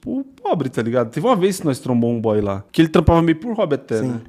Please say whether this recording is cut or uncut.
cut